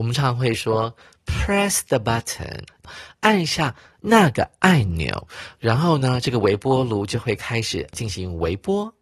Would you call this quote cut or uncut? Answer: uncut